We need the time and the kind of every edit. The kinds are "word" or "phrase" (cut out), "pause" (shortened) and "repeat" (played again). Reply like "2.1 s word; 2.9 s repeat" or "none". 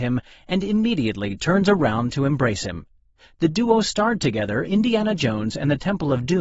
4.6 s word